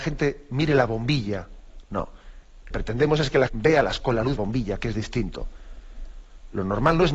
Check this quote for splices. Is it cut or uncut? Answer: cut